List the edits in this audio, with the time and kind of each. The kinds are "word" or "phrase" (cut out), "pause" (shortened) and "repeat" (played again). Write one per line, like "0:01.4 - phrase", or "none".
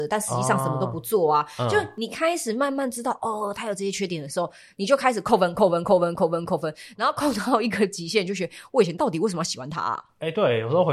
none